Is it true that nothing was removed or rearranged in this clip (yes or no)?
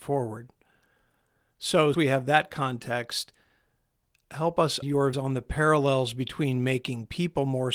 no